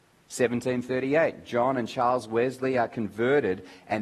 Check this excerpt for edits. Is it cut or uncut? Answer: uncut